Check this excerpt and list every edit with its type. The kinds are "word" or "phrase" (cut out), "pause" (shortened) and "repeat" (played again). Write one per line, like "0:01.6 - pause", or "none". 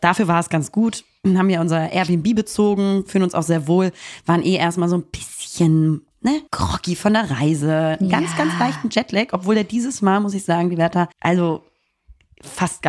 0:06.5 - pause
0:11.1 - pause